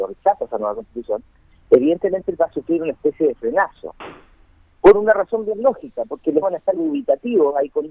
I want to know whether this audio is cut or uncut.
cut